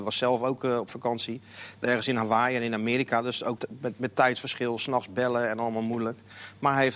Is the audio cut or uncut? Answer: cut